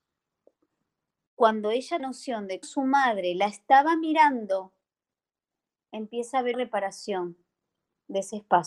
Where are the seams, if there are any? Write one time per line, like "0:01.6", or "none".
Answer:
0:02.0
0:02.6
0:06.5